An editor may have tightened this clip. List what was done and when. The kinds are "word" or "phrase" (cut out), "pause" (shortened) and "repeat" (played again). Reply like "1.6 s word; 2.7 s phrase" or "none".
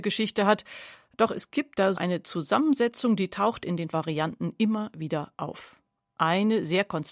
1.9 s word; 3.9 s word